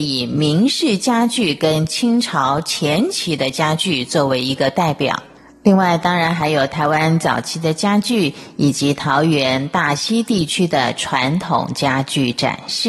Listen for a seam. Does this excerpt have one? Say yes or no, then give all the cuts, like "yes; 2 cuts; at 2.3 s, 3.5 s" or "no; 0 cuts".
no; 0 cuts